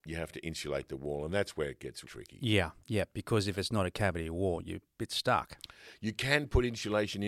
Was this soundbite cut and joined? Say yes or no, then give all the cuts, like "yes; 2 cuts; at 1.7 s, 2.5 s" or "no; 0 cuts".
yes; 2 cuts; at 2.0 s, 2.8 s